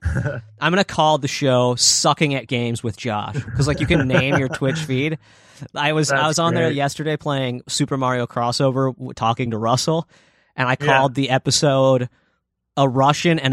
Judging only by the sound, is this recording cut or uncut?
uncut